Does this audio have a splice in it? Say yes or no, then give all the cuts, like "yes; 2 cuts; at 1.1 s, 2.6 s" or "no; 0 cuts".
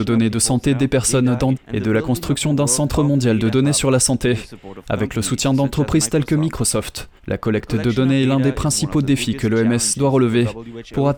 yes; 2 cuts; at 1.5 s, 7.2 s